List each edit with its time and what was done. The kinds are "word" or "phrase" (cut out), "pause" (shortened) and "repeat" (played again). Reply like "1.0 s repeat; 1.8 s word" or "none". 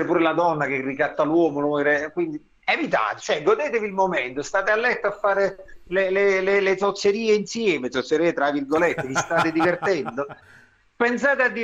2.6 s pause; 10.4 s pause